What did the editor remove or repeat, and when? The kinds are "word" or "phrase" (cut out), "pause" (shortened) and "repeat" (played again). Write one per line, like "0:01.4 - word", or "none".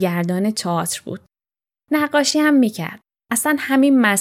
none